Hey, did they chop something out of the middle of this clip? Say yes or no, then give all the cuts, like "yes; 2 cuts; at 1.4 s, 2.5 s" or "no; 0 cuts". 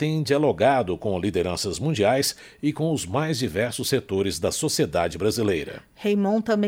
no; 0 cuts